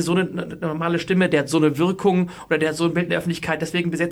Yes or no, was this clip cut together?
no